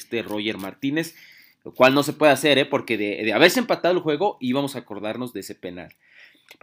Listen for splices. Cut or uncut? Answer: uncut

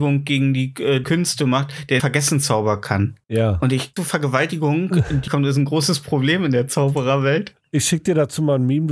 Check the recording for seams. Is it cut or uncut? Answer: cut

